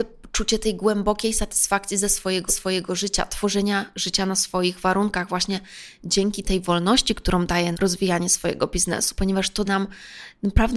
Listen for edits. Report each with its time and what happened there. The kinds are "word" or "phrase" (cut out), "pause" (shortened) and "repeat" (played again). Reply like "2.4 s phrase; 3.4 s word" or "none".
2.5 s repeat; 7.7 s word; 9.7 s word